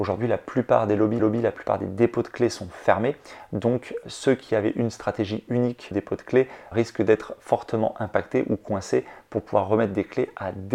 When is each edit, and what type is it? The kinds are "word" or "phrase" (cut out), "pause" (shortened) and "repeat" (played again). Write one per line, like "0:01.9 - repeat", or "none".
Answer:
0:01.2 - repeat
0:04.0 - word
0:05.9 - word
0:06.7 - word